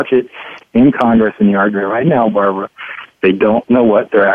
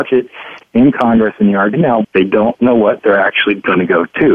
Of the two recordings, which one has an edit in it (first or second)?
second